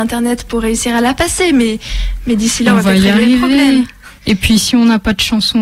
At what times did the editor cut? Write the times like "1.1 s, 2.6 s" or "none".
4.2 s